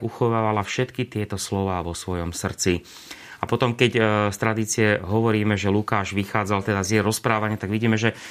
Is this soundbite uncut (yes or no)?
yes